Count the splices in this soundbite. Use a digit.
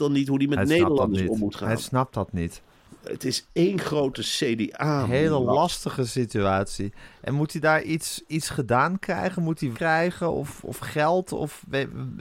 1